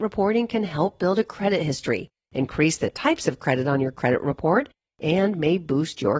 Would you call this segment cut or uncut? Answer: uncut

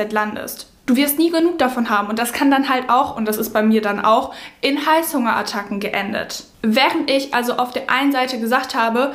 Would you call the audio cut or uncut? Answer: uncut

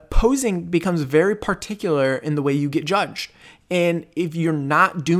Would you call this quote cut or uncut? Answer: uncut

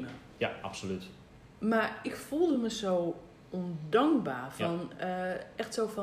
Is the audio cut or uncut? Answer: uncut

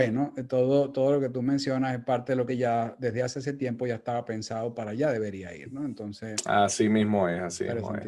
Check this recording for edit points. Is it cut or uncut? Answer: cut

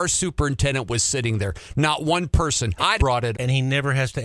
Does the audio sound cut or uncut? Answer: cut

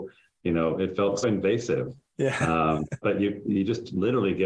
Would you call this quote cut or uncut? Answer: cut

